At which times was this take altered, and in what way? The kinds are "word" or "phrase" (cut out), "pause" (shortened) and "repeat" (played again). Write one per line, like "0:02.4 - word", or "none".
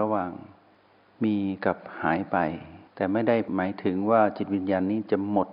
0:02.9 - pause